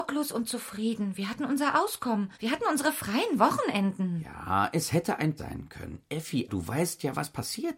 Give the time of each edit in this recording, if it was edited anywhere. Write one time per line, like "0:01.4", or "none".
0:02.3
0:05.4
0:06.5